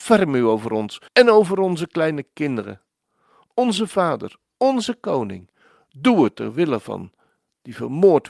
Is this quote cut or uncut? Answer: cut